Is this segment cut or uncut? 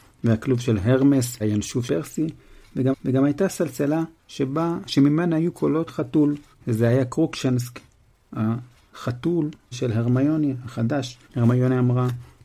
cut